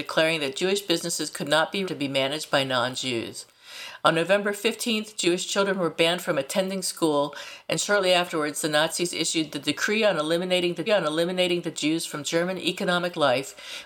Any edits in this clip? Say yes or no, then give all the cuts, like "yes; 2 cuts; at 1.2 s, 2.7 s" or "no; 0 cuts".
yes; 2 cuts; at 1.8 s, 10.9 s